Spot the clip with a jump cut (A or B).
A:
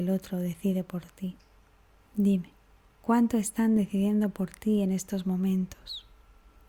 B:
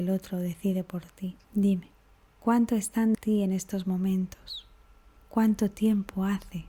B